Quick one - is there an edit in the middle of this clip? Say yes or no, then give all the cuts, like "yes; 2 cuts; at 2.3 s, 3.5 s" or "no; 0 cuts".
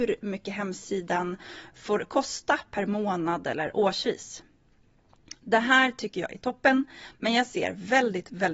no; 0 cuts